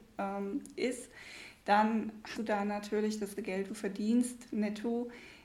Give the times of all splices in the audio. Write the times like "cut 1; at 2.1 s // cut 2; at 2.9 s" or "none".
cut 1; at 2.3 s // cut 2; at 3.4 s // cut 3; at 3.7 s